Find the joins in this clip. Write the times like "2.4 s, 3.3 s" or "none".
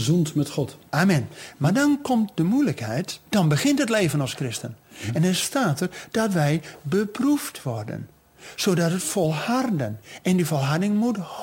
3.3 s